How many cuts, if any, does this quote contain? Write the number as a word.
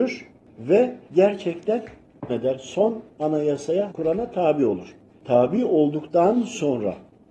three